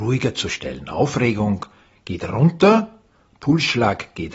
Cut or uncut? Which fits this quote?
uncut